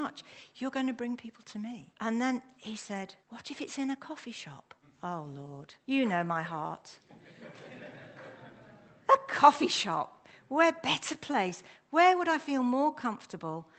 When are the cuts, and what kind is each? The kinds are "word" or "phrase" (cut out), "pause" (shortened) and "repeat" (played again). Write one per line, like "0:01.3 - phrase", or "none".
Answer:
0:01.9 - pause
0:03.2 - pause
0:04.8 - pause
0:05.8 - pause